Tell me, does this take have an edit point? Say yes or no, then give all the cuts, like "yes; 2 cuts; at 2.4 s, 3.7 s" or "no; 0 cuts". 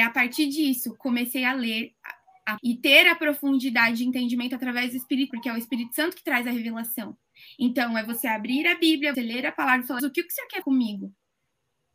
yes; 5 cuts; at 2.6 s, 5.3 s, 9.1 s, 10.0 s, 10.6 s